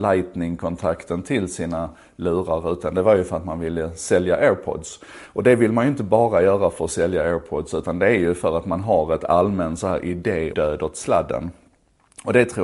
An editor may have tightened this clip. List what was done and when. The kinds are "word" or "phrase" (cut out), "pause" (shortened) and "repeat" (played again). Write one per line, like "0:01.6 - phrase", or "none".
0:10.5 - word